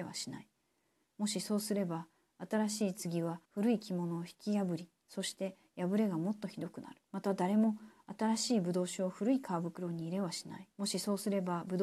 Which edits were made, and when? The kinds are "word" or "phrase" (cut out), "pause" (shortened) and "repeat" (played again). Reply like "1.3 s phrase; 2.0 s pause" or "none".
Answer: 3.4 s pause; 7.0 s pause; 10.7 s pause